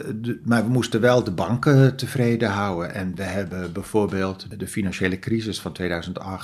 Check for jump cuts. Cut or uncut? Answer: uncut